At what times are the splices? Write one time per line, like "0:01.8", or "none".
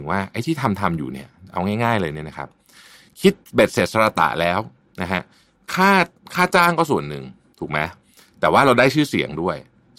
none